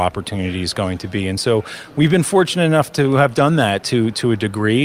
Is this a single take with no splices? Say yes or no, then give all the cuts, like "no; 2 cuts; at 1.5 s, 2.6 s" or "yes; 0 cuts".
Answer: yes; 0 cuts